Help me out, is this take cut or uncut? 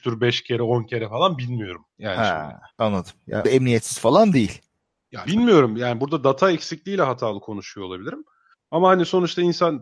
cut